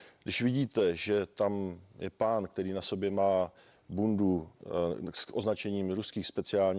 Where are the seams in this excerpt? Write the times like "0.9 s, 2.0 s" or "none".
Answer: none